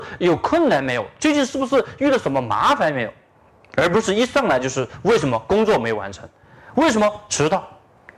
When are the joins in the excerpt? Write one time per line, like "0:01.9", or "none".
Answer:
none